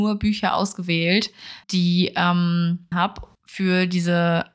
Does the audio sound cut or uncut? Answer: cut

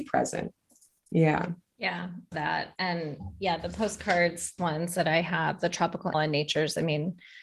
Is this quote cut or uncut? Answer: cut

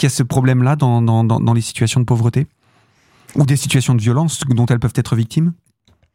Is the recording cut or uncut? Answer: uncut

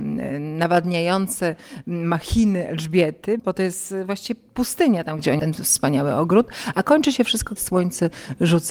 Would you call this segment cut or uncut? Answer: cut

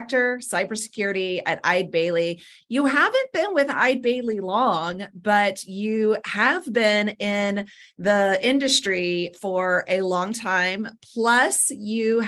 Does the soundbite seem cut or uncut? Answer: uncut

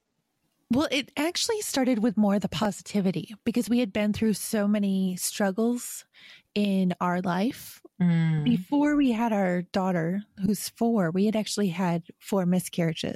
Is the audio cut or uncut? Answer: uncut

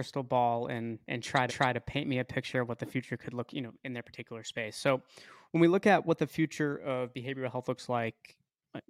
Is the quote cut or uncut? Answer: cut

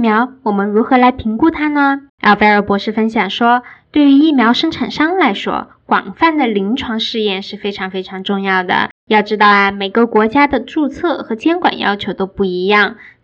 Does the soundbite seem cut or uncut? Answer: cut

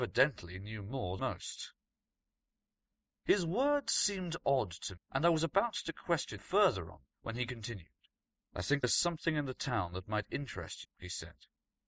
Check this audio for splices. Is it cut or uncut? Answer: cut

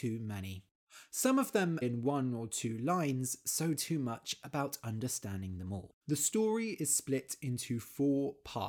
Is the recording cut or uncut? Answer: cut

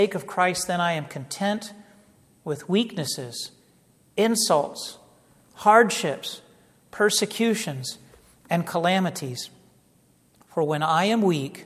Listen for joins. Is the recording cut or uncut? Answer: uncut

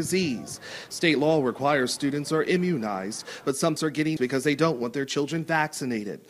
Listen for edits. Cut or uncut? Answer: cut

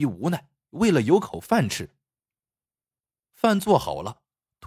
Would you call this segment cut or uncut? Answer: uncut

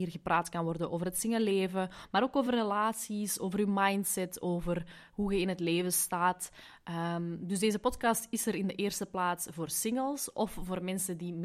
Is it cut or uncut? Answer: uncut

